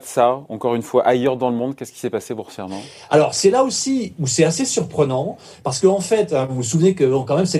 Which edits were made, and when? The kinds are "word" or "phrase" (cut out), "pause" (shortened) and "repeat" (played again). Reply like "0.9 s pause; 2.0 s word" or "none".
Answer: none